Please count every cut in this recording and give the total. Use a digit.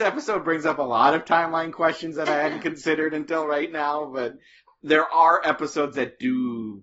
0